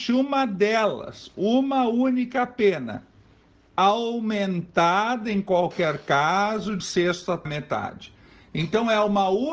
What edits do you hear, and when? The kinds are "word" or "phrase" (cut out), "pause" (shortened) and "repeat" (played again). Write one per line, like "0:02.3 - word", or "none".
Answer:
0:06.8 - word
0:07.5 - word